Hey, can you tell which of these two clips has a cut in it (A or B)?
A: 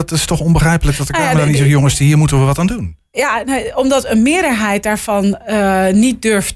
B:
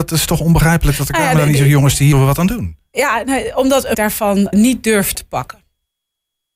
B